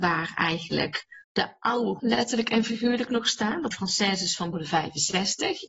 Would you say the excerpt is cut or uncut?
cut